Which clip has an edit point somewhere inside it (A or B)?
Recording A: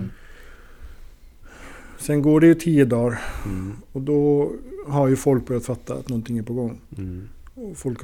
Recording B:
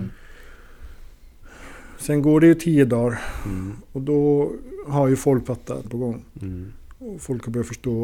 B